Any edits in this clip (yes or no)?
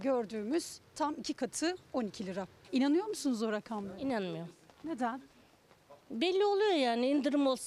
yes